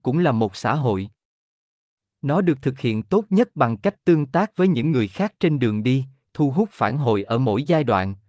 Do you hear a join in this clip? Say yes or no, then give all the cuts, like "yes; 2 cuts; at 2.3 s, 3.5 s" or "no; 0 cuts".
no; 0 cuts